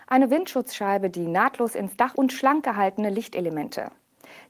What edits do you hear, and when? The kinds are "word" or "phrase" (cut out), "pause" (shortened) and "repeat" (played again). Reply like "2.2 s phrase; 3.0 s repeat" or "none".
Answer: 2.1 s word